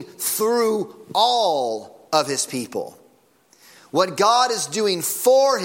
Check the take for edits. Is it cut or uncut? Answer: uncut